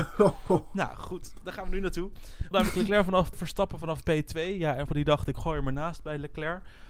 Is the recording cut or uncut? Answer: cut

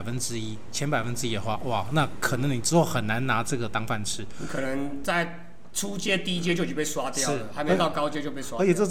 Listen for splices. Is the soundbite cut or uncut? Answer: uncut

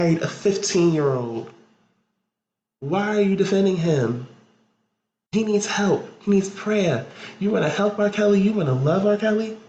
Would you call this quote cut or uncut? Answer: uncut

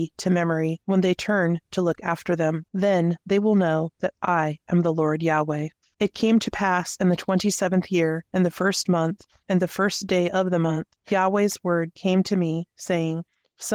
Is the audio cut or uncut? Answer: uncut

